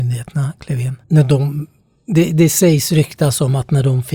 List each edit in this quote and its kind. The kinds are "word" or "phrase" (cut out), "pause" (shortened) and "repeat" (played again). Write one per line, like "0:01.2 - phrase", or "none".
none